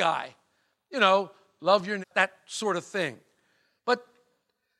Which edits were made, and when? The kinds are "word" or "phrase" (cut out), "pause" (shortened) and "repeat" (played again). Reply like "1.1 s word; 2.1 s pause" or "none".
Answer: 2.0 s phrase